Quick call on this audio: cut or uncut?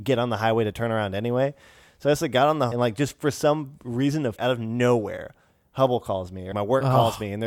cut